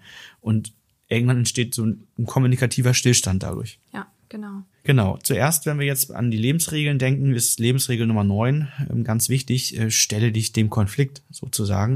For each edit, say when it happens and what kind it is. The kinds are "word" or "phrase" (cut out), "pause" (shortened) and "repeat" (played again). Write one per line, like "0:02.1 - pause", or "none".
0:03.8 - pause
0:04.7 - pause